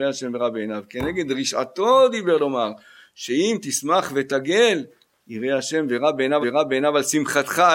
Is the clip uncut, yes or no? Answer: no